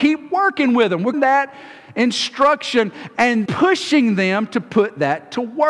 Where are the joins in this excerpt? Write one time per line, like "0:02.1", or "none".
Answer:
0:01.1
0:03.5